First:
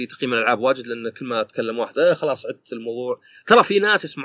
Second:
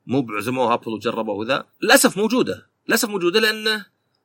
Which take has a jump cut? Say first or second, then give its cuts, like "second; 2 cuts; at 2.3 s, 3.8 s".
second; 1 cut; at 1.7 s